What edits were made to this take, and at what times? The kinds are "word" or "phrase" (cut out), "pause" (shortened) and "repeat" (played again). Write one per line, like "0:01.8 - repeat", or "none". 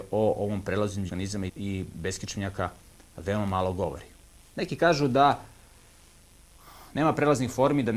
0:01.1 - word
0:01.5 - word

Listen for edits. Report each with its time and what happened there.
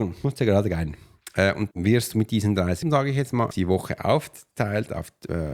0:01.7 - word
0:02.8 - word
0:03.5 - word

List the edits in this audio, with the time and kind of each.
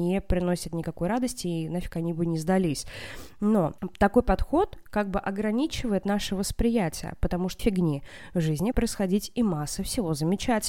0:07.6 - word
0:08.7 - word

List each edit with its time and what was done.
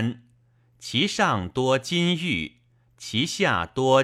none

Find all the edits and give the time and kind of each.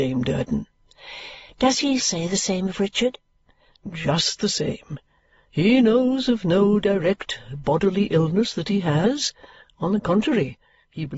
0:02.0 - word

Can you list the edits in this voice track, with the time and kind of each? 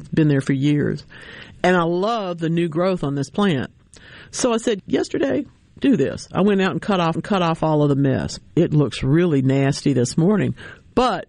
0:04.8 - word
0:07.1 - repeat
0:08.5 - pause

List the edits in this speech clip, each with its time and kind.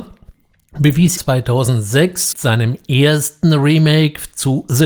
0:01.2 - phrase
0:02.3 - word

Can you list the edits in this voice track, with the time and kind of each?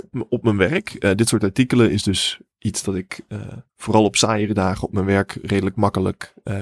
0:03.7 - pause

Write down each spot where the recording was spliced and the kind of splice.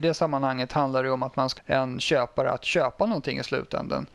0:01.6 - word

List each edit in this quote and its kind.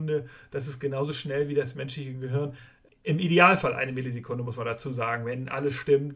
0:02.9 - pause

